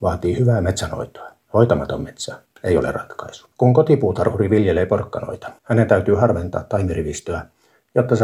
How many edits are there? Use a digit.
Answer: 3